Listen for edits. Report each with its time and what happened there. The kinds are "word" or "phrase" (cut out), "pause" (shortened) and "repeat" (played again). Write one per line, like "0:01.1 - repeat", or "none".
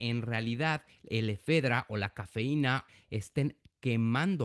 none